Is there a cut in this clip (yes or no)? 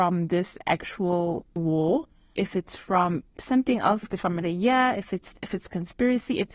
yes